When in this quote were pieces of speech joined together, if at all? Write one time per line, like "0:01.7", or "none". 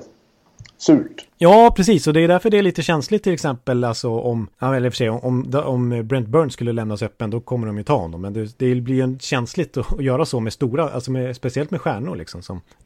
0:01.3
0:04.5